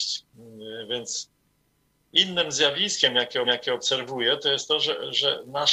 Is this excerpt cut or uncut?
cut